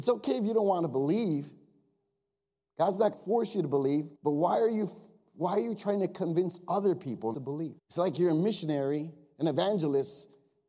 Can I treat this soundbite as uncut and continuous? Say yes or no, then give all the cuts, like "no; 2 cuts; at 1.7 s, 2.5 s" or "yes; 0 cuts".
no; 4 cuts; at 3.1 s, 4.2 s, 7.3 s, 7.8 s